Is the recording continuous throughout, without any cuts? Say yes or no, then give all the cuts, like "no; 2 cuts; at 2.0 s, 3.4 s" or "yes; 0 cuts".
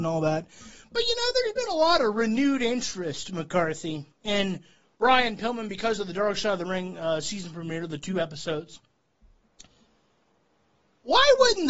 no; 1 cut; at 4.1 s